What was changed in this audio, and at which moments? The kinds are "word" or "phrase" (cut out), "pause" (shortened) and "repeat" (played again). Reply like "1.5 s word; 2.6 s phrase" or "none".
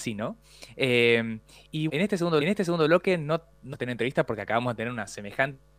1.9 s word; 2.4 s repeat; 3.7 s word